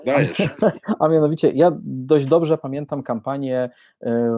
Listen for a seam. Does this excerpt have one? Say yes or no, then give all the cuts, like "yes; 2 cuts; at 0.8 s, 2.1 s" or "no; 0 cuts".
no; 0 cuts